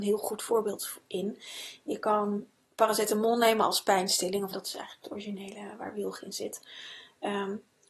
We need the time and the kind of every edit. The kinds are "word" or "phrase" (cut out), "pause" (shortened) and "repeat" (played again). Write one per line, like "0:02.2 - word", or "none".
0:02.6 - word
0:04.5 - word